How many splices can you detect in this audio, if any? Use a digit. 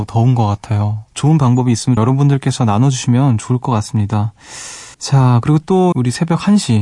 4